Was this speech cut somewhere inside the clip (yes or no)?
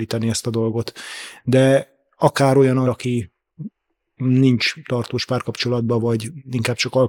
yes